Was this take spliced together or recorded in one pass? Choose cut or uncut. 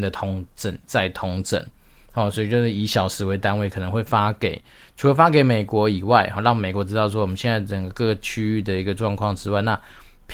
uncut